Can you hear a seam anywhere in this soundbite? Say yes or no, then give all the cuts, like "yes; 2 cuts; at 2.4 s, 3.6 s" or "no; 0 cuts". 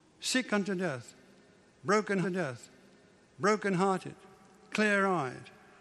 yes; 1 cut; at 2.2 s